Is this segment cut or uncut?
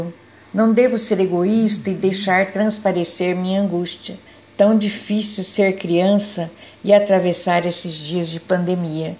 cut